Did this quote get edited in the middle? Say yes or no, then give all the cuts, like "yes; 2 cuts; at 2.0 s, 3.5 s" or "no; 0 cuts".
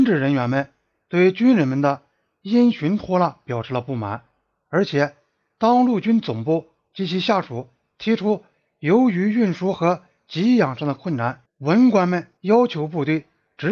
yes; 1 cut; at 12.4 s